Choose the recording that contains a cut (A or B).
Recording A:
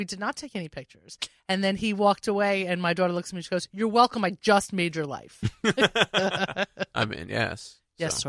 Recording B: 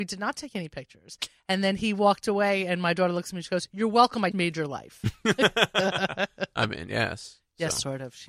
B